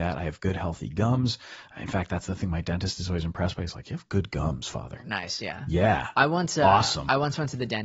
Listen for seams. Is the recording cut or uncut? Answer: uncut